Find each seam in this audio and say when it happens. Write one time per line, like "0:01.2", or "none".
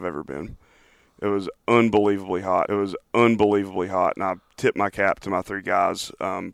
0:02.7